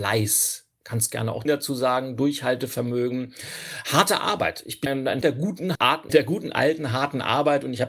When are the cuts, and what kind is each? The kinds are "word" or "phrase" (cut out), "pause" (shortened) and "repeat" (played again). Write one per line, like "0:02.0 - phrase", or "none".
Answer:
0:01.4 - word
0:04.9 - word
0:05.2 - word
0:05.7 - word
0:06.1 - word